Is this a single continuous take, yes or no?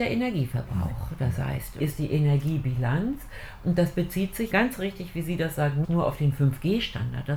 no